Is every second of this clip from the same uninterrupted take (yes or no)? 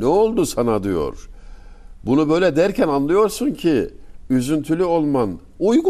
yes